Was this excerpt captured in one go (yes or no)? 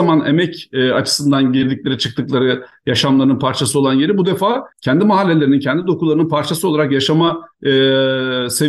no